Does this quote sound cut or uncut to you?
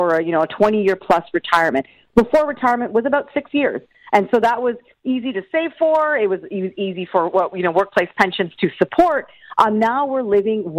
uncut